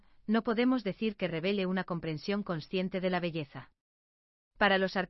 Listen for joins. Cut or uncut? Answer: uncut